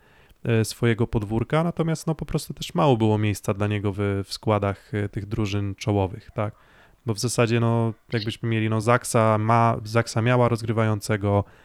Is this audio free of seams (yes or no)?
yes